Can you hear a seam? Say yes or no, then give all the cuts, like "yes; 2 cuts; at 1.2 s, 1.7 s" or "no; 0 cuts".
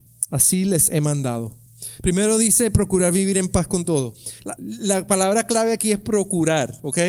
no; 0 cuts